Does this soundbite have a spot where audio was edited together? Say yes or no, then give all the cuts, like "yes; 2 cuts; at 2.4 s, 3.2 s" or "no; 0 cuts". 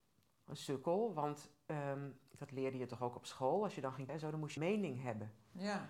yes; 3 cuts; at 2.3 s, 4.1 s, 4.6 s